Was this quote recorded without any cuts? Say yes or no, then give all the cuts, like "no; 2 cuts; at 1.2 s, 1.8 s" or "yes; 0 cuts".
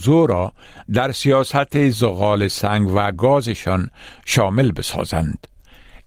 yes; 0 cuts